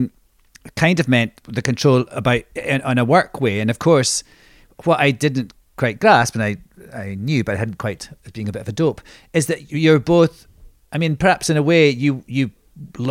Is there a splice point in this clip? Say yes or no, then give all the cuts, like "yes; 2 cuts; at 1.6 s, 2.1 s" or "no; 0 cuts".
no; 0 cuts